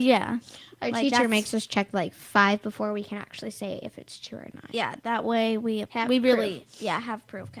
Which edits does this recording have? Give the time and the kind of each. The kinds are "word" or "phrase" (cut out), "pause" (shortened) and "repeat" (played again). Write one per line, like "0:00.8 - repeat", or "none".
0:05.9 - word

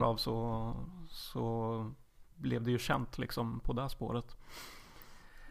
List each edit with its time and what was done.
none

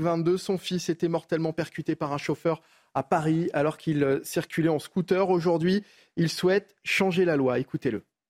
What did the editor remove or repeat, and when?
none

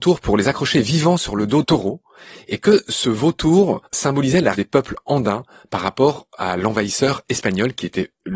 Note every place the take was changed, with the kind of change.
0:01.6 - word
0:03.9 - pause
0:04.5 - word

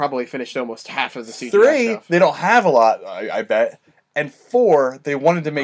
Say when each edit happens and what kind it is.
none

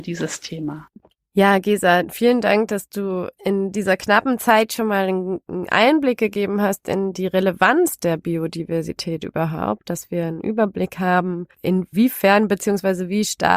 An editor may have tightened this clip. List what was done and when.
none

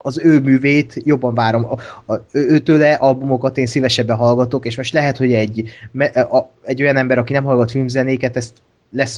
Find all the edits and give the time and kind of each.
none

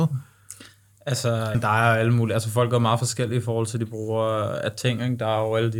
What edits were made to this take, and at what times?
0:01.5 - word

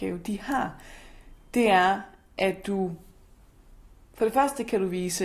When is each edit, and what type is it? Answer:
none

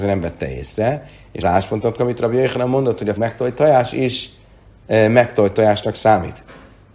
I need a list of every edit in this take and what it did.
0:01.4 - phrase
0:02.0 - word
0:03.2 - word

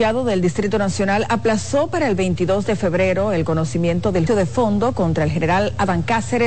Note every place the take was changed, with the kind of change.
0:04.3 - word

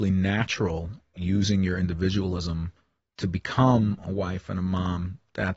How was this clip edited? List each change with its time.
0:01.2 - word

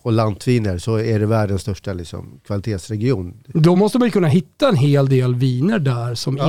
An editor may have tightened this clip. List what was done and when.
none

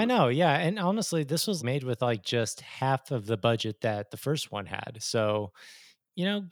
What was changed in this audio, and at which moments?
0:01.6 - word

